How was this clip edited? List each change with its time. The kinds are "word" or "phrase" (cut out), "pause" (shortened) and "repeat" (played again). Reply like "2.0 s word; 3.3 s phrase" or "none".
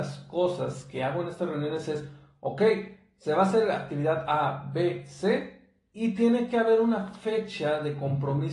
none